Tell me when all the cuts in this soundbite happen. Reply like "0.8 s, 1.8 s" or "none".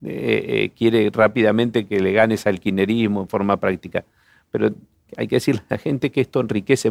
none